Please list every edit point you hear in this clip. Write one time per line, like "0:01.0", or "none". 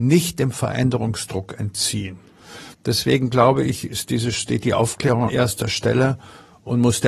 0:02.7
0:05.3